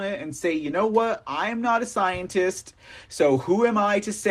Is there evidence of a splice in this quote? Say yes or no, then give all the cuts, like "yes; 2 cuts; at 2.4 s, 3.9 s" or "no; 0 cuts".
no; 0 cuts